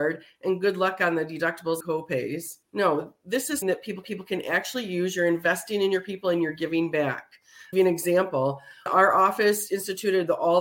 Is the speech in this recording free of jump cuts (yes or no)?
no